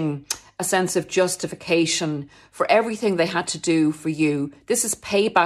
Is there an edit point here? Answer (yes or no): no